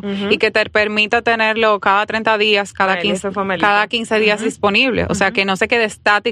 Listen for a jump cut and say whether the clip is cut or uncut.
uncut